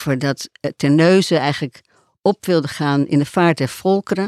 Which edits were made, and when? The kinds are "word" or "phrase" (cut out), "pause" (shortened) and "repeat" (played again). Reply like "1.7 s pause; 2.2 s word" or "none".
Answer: none